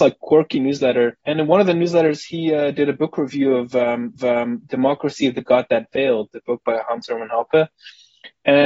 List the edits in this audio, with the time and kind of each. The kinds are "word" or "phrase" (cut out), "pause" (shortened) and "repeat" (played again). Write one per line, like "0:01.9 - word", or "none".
0:01.2 - pause
0:04.2 - repeat
0:06.3 - word